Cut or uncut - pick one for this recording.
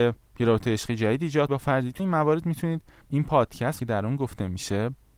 cut